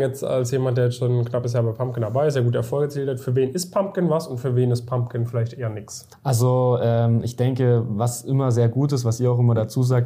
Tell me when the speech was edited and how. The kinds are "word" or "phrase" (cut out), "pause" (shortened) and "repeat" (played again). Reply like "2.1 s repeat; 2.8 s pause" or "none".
6.1 s pause